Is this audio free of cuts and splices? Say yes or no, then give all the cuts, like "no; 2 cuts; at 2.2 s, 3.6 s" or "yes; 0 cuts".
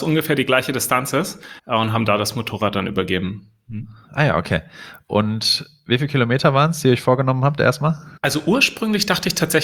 no; 2 cuts; at 1.6 s, 8.2 s